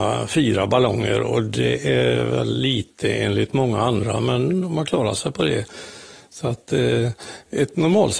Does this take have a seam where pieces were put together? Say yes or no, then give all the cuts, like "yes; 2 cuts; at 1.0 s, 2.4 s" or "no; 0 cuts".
no; 0 cuts